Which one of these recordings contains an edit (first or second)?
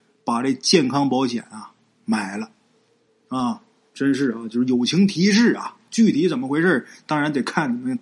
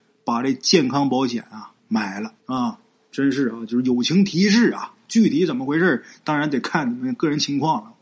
second